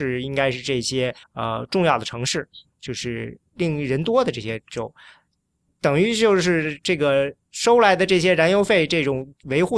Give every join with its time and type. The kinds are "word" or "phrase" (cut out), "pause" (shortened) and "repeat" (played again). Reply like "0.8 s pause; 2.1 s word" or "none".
1.2 s pause